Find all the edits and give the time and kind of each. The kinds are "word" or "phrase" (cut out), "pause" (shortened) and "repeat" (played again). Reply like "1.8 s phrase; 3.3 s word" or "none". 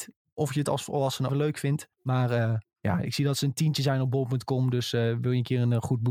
1.3 s phrase; 1.9 s pause